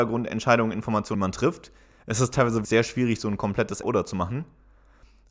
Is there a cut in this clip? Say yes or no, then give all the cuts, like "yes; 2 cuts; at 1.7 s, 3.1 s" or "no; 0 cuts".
yes; 3 cuts; at 1.1 s, 2.6 s, 3.8 s